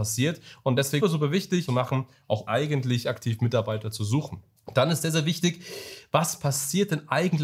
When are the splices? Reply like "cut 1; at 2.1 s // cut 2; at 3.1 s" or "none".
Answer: cut 1; at 1.0 s // cut 2; at 1.7 s // cut 3; at 2.5 s // cut 4; at 4.6 s